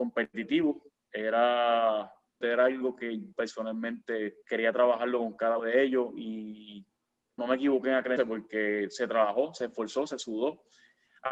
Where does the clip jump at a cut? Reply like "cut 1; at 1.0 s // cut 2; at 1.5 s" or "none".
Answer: cut 1; at 2.4 s // cut 2; at 3.3 s // cut 3; at 4.4 s // cut 4; at 5.6 s // cut 5; at 7.4 s // cut 6; at 8.2 s